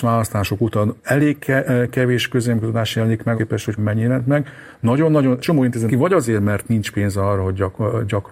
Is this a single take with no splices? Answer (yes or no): no